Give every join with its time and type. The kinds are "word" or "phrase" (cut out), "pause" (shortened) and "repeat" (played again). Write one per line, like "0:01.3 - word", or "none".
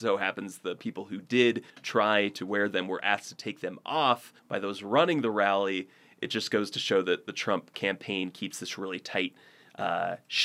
0:01.7 - pause
0:04.4 - pause